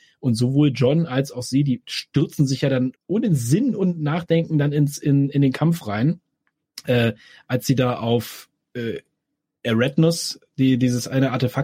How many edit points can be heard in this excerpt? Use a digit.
1